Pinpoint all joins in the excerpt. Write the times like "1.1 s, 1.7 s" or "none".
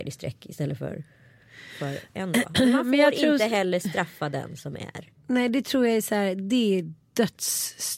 5.1 s

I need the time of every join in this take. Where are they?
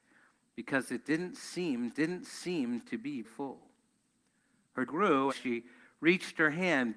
1.9 s, 3.2 s, 4.9 s, 5.3 s

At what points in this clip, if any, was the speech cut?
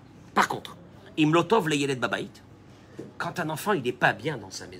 none

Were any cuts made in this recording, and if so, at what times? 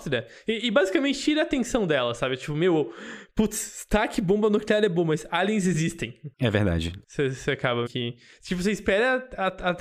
7.9 s

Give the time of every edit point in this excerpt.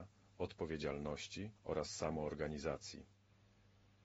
1.6 s

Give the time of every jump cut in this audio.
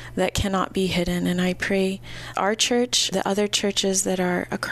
2.3 s, 3.1 s

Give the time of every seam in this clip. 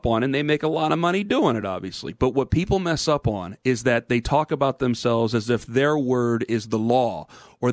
none

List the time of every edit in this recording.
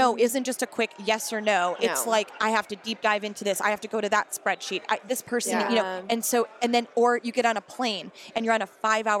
none

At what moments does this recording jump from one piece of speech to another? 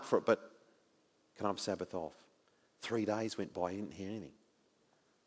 none

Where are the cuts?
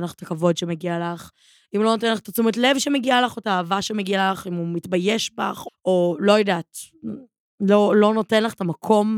5.7 s

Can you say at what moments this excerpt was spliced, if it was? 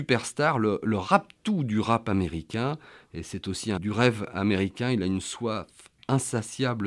3.8 s

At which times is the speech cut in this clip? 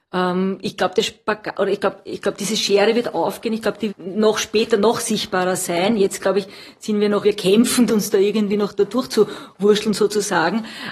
3.9 s, 7.2 s, 7.9 s

